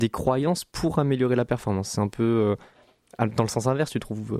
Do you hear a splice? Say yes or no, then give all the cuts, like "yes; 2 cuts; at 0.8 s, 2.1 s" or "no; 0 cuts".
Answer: no; 0 cuts